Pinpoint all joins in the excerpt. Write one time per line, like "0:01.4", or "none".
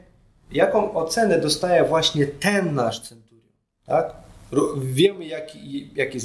none